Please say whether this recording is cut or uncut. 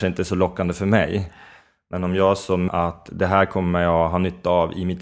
cut